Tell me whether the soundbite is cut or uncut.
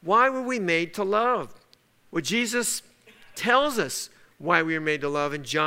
uncut